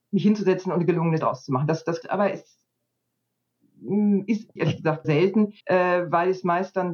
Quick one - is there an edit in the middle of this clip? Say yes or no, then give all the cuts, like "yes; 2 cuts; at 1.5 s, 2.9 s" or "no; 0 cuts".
yes; 5 cuts; at 1.2 s, 2.0 s, 4.6 s, 5.0 s, 5.6 s